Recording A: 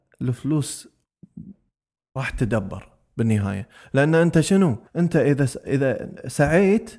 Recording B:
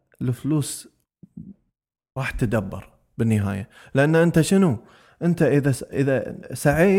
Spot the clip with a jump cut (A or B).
A